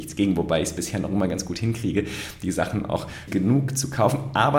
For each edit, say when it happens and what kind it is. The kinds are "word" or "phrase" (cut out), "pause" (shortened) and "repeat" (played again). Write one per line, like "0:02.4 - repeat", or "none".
0:03.3 - word